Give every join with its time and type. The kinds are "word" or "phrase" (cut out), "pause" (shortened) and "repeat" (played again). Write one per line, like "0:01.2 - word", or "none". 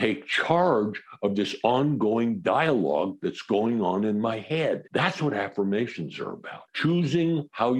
0:04.9 - pause
0:06.7 - pause